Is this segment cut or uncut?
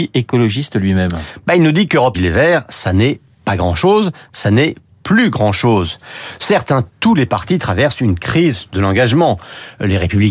cut